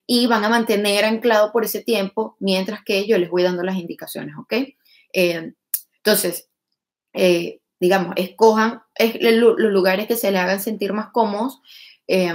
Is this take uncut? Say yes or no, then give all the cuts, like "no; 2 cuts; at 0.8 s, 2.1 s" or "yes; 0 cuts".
yes; 0 cuts